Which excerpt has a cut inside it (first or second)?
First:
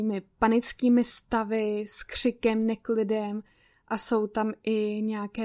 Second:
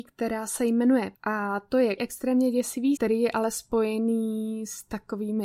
second